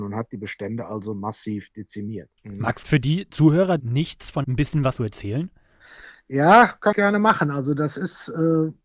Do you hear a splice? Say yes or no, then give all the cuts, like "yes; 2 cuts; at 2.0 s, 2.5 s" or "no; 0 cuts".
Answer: yes; 6 cuts; at 2.4 s, 2.8 s, 3.8 s, 4.4 s, 5.0 s, 6.9 s